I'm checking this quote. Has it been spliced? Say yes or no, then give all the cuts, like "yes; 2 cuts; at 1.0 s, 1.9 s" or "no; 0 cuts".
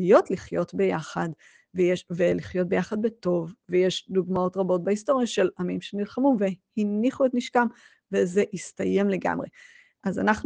no; 0 cuts